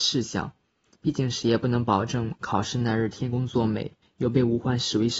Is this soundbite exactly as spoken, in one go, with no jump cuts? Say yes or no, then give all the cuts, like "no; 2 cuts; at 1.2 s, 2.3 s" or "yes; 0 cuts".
no; 1 cut; at 4.0 s